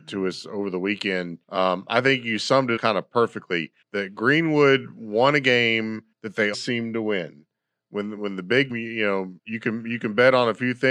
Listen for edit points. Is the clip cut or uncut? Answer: cut